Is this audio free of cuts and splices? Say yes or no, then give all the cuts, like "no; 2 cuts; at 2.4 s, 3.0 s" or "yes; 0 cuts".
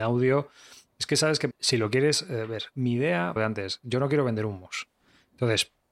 no; 3 cuts; at 1.5 s, 2.7 s, 3.4 s